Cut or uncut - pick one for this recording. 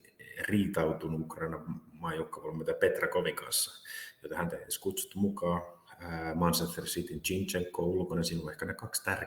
uncut